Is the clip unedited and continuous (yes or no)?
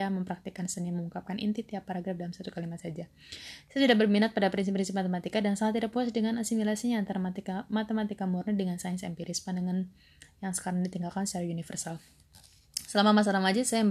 yes